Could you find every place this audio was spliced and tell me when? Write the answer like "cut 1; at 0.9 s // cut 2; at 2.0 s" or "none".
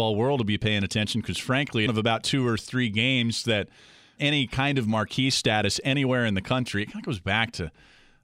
cut 1; at 1.9 s // cut 2; at 4.2 s